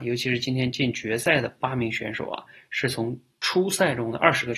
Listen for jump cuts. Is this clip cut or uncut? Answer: uncut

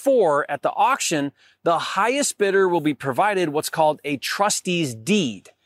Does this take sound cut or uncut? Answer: uncut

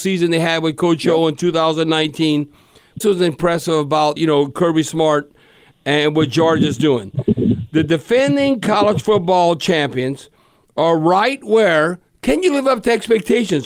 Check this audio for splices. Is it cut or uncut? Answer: cut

